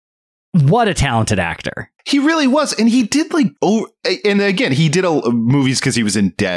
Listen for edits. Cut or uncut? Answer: cut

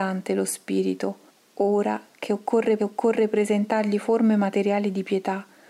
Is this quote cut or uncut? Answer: cut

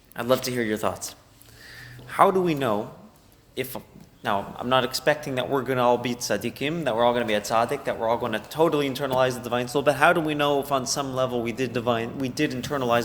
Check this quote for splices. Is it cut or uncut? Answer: uncut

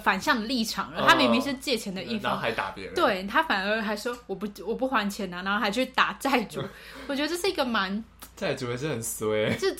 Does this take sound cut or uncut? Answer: cut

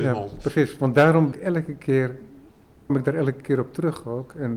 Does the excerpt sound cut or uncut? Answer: cut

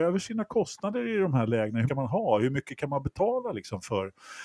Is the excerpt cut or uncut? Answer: cut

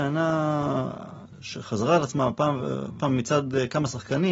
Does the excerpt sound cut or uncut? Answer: cut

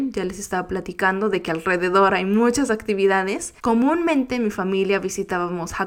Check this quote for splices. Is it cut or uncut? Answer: cut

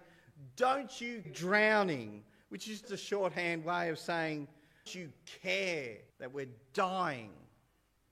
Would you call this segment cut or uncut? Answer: cut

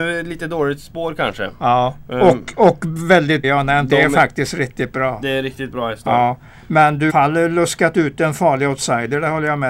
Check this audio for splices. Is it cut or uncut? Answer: cut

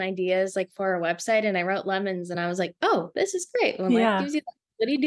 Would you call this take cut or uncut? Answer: uncut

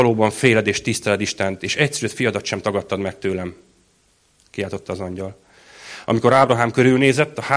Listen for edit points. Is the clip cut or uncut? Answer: uncut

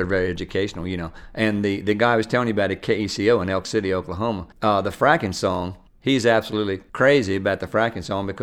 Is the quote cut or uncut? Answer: cut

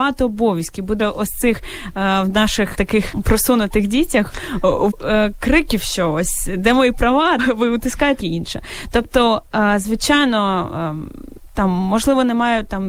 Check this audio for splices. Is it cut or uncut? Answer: cut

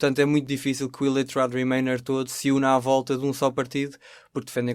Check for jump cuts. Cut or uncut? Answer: uncut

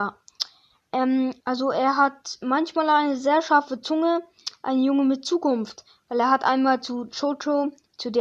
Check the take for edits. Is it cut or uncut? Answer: cut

